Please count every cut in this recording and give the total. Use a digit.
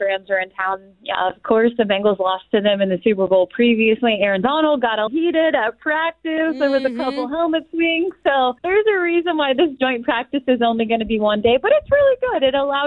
2